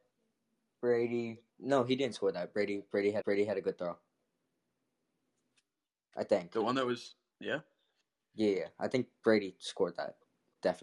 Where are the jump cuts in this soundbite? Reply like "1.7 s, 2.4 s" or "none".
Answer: 1.5 s, 3.2 s, 7.3 s

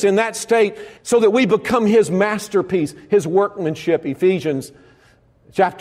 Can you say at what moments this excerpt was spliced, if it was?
1.0 s

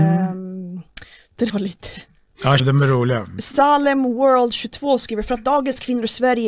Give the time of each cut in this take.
1.5 s, 2.6 s

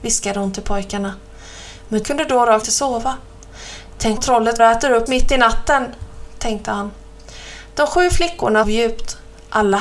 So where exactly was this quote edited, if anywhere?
2.0 s, 2.6 s, 4.2 s, 4.6 s, 5.1 s, 8.6 s

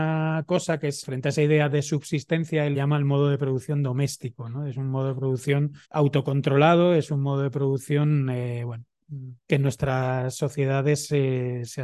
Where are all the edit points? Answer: 1.0 s, 2.7 s, 5.8 s, 9.4 s

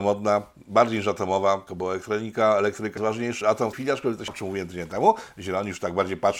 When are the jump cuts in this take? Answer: 1.7 s, 3.0 s, 3.4 s, 3.7 s, 4.3 s

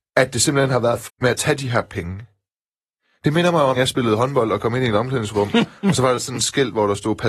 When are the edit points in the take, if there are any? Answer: 1.1 s, 3.8 s

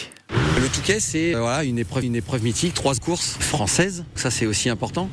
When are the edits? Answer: 1.3 s, 2.0 s, 3.0 s, 4.2 s

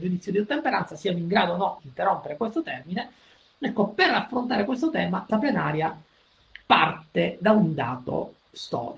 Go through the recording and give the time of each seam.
1.8 s, 5.3 s

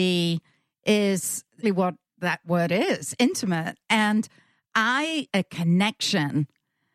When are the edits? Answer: 1.6 s, 2.4 s, 5.3 s

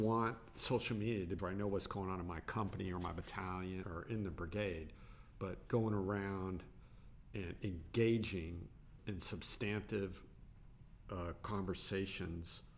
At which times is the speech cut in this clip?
1.4 s, 3.8 s, 9.0 s

